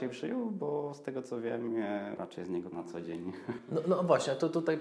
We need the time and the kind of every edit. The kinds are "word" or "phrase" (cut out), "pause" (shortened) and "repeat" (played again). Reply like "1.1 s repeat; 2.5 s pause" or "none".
2.2 s word; 2.7 s word